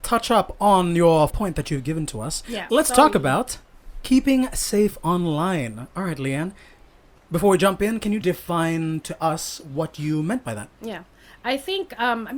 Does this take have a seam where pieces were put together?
yes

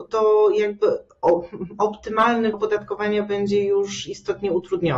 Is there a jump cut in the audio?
yes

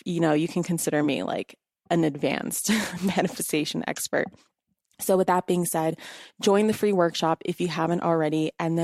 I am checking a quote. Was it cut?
no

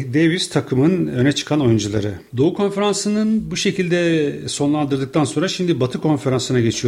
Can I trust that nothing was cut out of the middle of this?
no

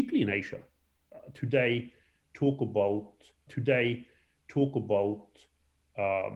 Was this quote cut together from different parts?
yes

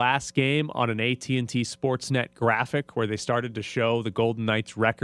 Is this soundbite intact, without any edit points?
yes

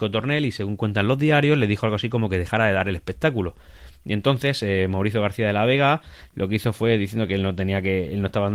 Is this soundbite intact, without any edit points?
yes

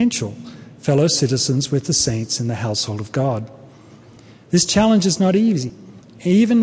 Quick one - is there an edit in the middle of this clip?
no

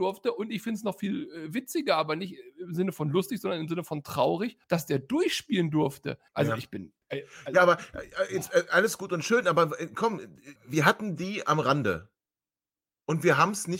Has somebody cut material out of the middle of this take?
yes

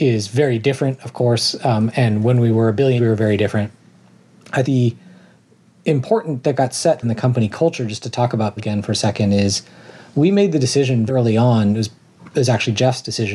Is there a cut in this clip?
yes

